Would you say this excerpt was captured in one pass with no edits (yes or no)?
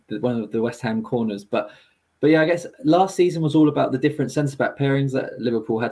yes